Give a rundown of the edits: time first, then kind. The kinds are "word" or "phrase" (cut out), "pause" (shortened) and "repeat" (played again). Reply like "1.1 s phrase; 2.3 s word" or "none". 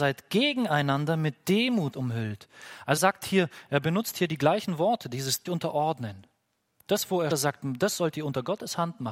1.9 s word; 3.0 s word; 5.5 s word; 7.3 s word